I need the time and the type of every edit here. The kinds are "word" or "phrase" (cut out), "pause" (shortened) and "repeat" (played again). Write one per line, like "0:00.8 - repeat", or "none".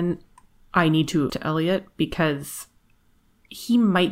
0:01.3 - word